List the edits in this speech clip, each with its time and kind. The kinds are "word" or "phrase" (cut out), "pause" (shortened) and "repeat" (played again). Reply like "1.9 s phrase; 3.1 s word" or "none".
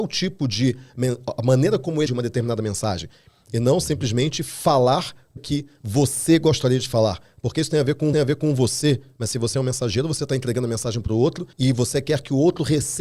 2.1 s word; 5.4 s word; 8.1 s repeat; 11.5 s pause